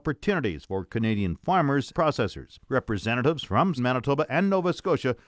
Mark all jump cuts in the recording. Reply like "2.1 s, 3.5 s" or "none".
1.9 s, 2.6 s, 3.8 s, 4.3 s